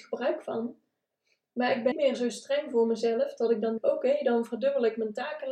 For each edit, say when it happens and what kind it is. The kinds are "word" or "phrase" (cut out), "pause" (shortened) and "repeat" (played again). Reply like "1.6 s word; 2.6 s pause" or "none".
1.9 s word; 3.8 s word

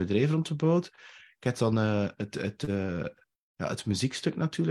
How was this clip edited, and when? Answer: none

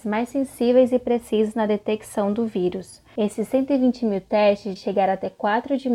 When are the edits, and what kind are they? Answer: 4.8 s word

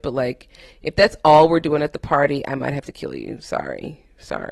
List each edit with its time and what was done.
none

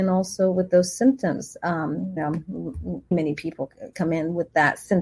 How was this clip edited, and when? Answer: 2.2 s word; 3.1 s word; 3.9 s word

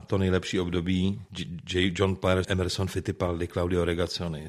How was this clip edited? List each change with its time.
1.3 s pause; 2.4 s phrase

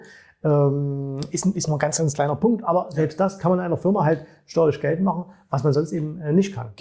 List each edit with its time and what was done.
none

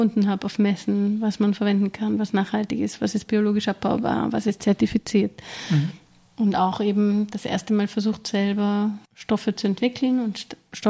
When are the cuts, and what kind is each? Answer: 9.1 s pause

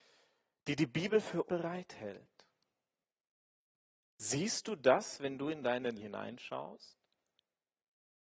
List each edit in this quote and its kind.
1.5 s word; 6.0 s word

